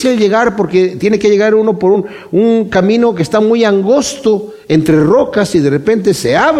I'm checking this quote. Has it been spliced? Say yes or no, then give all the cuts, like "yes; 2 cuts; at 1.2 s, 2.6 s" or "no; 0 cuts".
no; 0 cuts